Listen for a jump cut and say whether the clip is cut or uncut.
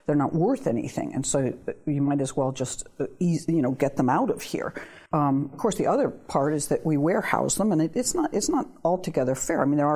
cut